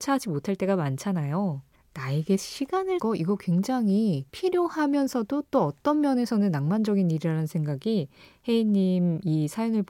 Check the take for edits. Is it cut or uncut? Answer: cut